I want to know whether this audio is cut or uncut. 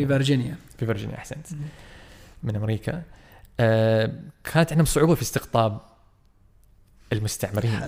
uncut